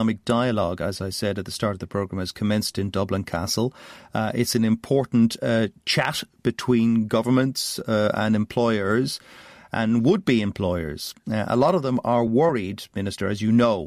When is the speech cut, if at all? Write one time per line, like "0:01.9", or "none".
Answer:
none